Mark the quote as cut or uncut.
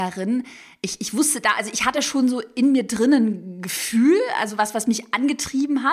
uncut